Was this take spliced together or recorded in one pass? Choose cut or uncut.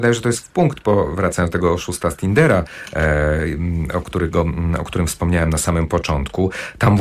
uncut